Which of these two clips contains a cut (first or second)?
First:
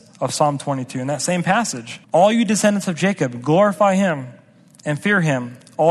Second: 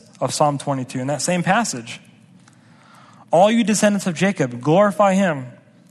first